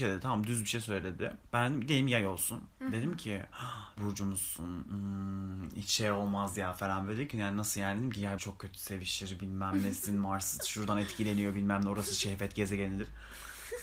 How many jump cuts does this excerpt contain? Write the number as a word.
three